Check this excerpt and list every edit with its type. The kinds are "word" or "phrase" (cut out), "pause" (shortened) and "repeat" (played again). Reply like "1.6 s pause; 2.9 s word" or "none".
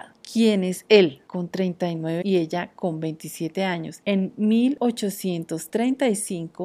2.2 s word